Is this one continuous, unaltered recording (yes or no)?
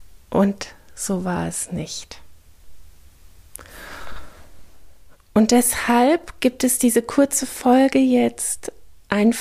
yes